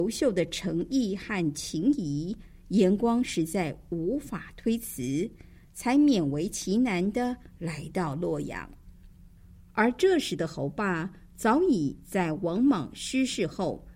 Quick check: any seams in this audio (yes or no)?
no